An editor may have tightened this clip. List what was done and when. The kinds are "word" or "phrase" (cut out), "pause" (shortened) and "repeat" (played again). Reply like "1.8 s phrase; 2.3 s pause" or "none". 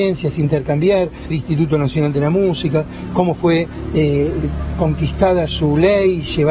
1.3 s phrase